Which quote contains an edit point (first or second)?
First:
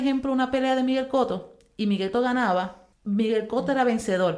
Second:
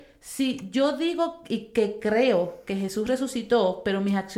first